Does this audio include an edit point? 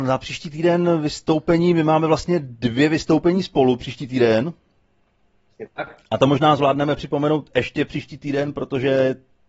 no; 0 cuts

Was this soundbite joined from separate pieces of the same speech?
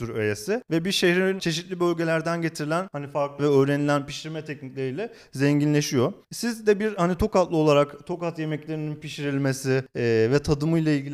yes; 2 cuts; at 1.4 s, 3.4 s

